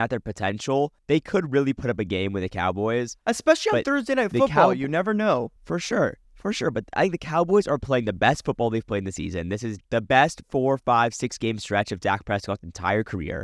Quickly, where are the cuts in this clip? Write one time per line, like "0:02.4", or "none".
0:01.0
0:05.6
0:06.2
0:09.8

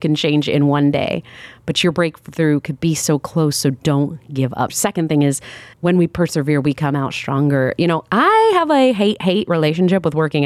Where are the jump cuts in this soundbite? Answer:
0:04.7
0:05.7

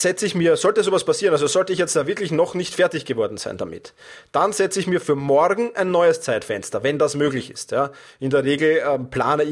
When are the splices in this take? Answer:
none

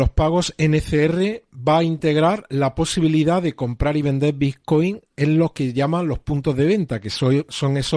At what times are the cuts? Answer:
none

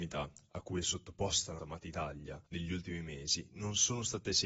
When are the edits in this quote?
0:01.6
0:02.5

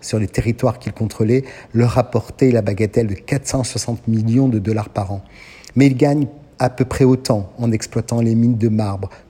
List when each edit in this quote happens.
none

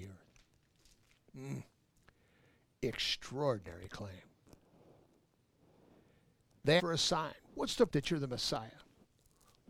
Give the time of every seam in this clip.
0:06.8
0:07.9

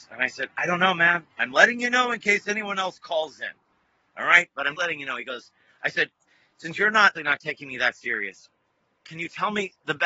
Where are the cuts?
0:04.7
0:07.1

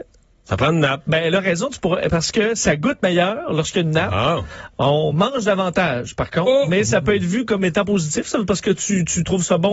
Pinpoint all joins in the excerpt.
none

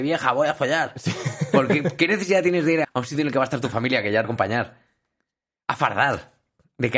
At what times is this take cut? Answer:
0:02.8
0:04.2

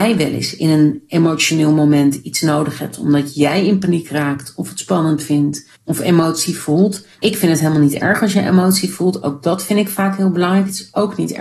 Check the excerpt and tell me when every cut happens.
0:05.7
0:07.1

